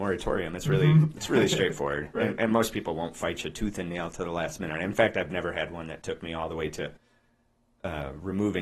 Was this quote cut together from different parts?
no; 0 cuts

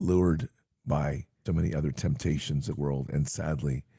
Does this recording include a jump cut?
yes; 2 cuts; at 1.5 s, 2.7 s

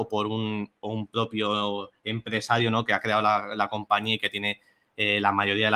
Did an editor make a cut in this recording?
no; 0 cuts

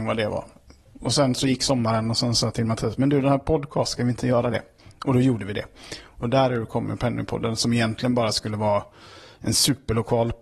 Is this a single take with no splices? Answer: yes; 0 cuts

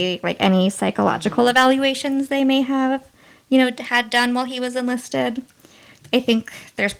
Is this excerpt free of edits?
yes; 0 cuts

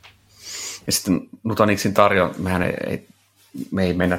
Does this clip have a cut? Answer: no; 0 cuts

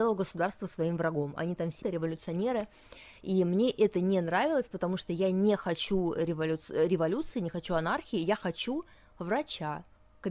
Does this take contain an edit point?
yes; 1 cut; at 1.8 s

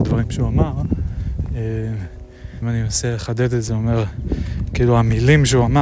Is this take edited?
yes; 2 cuts; at 2.6 s, 3.7 s

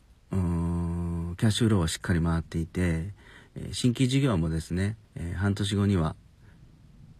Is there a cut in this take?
yes; 1 cut; at 5.0 s

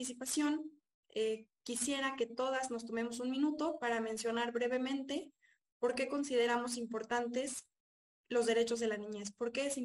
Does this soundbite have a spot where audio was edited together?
no; 0 cuts

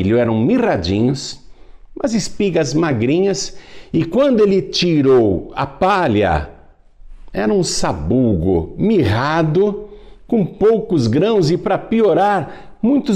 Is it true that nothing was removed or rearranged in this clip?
yes; 0 cuts

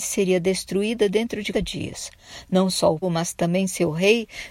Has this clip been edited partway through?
yes; 2 cuts; at 1.5 s, 3.0 s

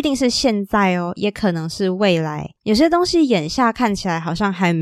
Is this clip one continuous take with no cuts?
no; 1 cut; at 2.6 s

